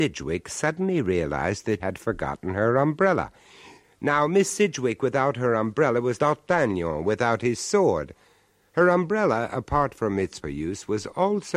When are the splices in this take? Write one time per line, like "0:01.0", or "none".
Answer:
0:01.8
0:06.2
0:10.4